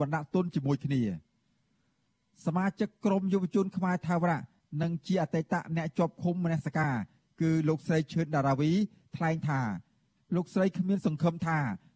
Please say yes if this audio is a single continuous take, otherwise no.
yes